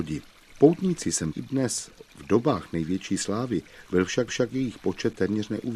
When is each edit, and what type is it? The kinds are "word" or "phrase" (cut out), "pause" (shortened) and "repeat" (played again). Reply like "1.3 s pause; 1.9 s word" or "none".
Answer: 1.3 s word; 4.3 s repeat